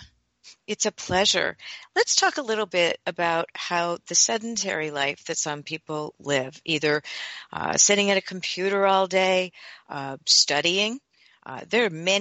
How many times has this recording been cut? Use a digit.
0